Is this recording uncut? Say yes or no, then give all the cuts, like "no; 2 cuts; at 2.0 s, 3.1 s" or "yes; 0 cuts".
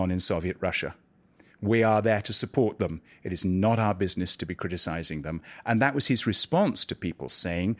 yes; 0 cuts